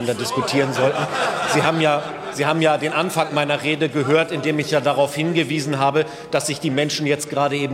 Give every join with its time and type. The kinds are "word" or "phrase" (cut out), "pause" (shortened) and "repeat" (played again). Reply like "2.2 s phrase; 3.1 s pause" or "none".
none

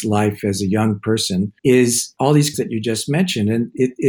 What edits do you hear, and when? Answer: 1.6 s pause; 2.5 s word

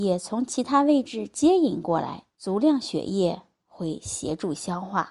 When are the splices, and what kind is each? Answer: 2.3 s pause

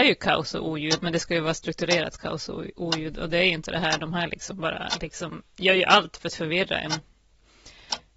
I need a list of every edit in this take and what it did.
none

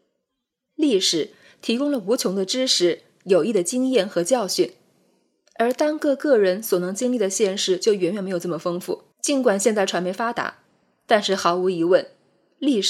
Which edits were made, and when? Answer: 9.1 s pause

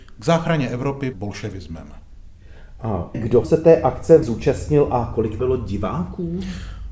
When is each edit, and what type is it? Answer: 1.1 s word; 3.1 s word; 3.4 s word; 4.2 s word; 5.4 s word

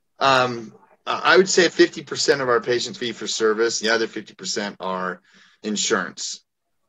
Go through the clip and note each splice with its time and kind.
1.7 s word; 2.9 s word; 3.8 s phrase; 5.6 s word

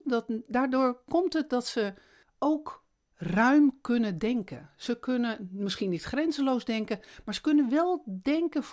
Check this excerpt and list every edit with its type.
none

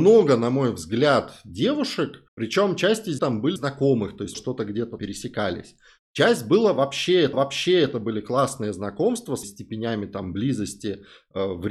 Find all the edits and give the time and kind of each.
2.3 s pause; 3.2 s word; 3.6 s phrase; 4.3 s phrase; 5.0 s word; 7.3 s repeat; 9.4 s word

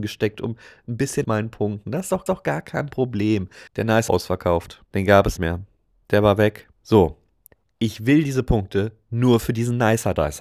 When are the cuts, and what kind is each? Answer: 1.2 s phrase; 2.3 s repeat; 3.7 s pause; 4.1 s phrase; 4.9 s pause; 5.4 s word; 6.7 s pause

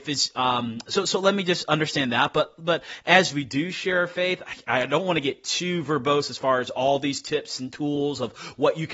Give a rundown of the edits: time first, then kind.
none

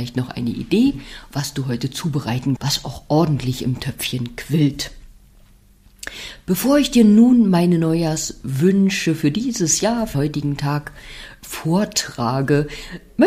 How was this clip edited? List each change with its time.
2.6 s word; 10.1 s word

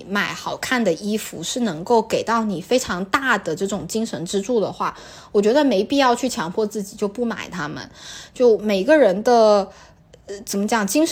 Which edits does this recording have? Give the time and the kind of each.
none

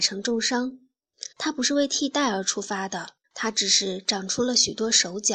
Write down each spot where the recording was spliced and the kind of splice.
1.3 s pause; 3.2 s pause

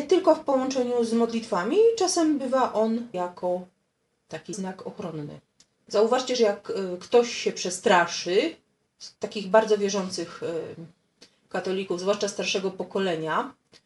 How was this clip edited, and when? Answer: 3.1 s word; 4.5 s word; 9.2 s pause

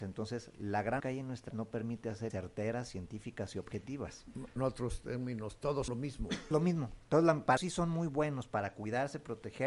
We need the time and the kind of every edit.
1.0 s word; 1.5 s word; 2.3 s word; 4.6 s word; 5.9 s word; 6.5 s word; 7.6 s word

